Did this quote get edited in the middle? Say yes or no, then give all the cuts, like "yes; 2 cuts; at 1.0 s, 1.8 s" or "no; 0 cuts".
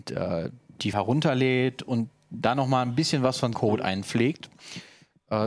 yes; 2 cuts; at 0.9 s, 3.5 s